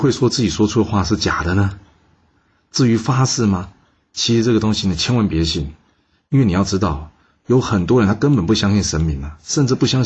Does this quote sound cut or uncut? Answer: uncut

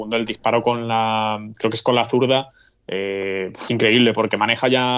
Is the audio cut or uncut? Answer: cut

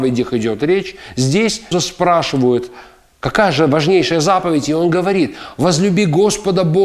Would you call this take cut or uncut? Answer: cut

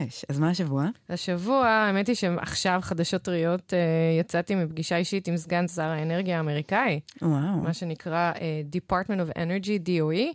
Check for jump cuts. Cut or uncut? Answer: uncut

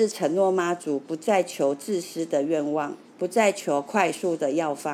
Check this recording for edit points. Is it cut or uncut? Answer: cut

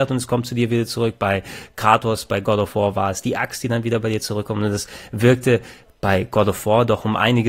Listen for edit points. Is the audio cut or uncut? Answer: uncut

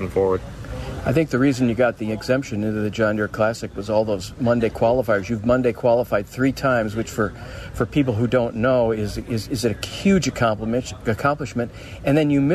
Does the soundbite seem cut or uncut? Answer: uncut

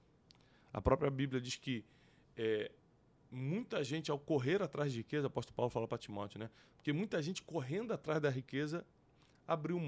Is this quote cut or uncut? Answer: uncut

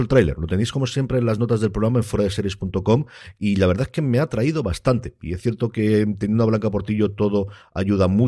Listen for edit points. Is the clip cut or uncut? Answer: uncut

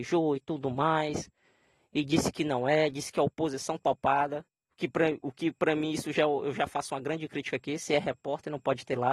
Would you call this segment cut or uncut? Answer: uncut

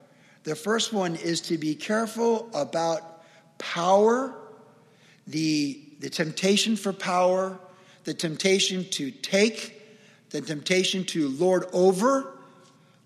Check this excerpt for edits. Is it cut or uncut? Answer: uncut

